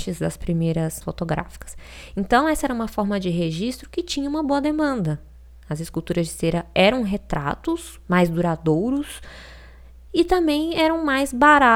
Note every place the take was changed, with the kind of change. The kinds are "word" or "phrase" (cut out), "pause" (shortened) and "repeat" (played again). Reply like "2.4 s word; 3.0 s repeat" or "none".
1.0 s word